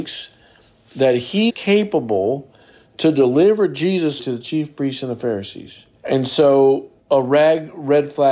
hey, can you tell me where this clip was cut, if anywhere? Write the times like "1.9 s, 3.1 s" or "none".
1.5 s, 4.2 s, 5.9 s, 7.0 s